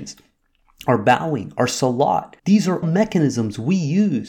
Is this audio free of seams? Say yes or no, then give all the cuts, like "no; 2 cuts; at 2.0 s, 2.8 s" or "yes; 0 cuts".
no; 2 cuts; at 2.4 s, 2.8 s